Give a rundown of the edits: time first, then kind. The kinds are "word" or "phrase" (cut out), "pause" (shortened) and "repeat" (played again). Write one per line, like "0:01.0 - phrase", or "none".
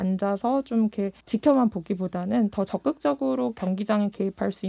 0:01.2 - pause